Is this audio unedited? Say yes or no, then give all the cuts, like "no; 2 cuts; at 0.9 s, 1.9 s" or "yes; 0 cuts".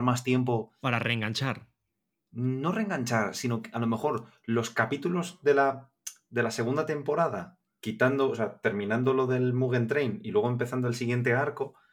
yes; 0 cuts